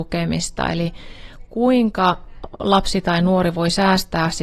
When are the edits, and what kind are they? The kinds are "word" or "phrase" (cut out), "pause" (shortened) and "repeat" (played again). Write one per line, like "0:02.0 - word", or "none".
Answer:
none